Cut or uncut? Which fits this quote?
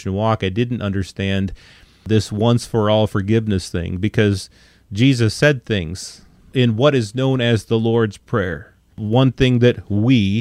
uncut